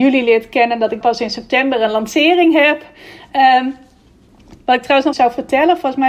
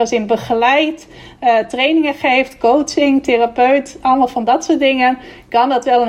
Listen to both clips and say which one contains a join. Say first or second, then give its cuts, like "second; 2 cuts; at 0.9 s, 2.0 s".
first; 2 cuts; at 1.0 s, 5.1 s